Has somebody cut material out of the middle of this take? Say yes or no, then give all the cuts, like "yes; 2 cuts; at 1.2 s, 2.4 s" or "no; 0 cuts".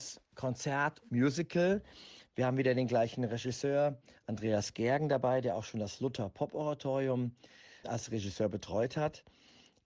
yes; 2 cuts; at 1.0 s, 7.8 s